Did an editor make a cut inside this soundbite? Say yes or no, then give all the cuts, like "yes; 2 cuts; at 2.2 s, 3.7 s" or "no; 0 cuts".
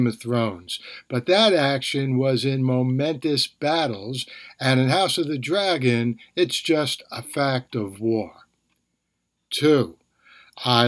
no; 0 cuts